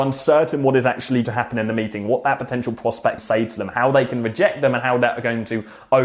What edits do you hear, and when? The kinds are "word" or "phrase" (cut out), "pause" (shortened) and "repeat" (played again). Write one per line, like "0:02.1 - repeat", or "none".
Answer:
0:01.2 - word
0:03.2 - word

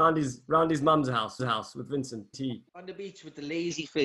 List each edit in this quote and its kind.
0:01.4 - repeat
0:02.3 - word
0:02.7 - pause

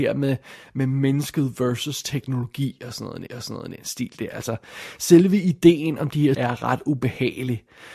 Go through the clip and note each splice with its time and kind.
0:03.3 - repeat
0:06.3 - word

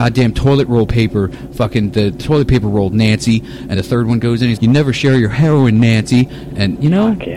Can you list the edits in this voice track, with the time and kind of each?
0:03.7 - word
0:04.6 - word

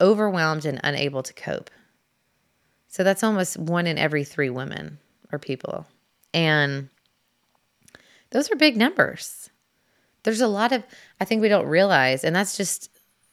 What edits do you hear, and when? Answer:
none

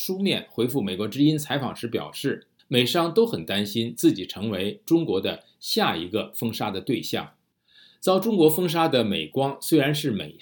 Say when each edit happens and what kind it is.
0:02.6 - pause

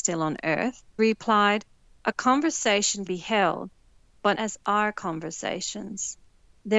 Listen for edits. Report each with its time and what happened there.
0:01.0 - word
0:03.1 - word
0:04.3 - word

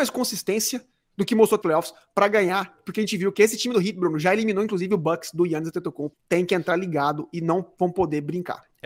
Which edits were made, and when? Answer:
0:01.6 - phrase
0:06.1 - word

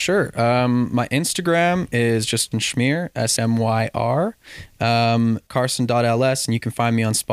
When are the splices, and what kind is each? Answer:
0:02.5 - word
0:03.4 - word
0:05.5 - word

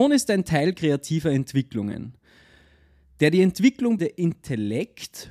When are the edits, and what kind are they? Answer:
0:04.0 - word

